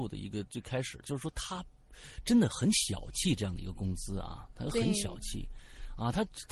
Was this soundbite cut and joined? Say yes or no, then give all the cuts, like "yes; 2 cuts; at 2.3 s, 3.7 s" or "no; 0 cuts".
no; 0 cuts